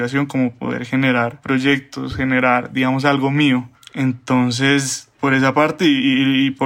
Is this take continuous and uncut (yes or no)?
yes